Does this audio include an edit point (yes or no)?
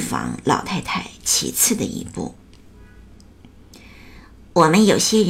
no